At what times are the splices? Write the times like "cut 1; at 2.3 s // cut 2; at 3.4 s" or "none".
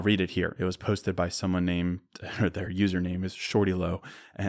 none